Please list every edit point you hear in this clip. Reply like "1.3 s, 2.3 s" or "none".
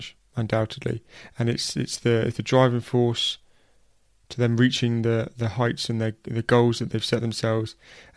none